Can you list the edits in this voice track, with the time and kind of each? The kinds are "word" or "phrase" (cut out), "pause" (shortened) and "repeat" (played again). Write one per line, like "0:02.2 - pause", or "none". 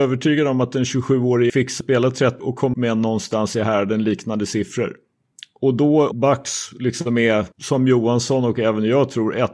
0:01.5 - word
0:01.8 - word
0:02.4 - word
0:02.7 - word
0:05.3 - pause
0:06.1 - word
0:07.5 - pause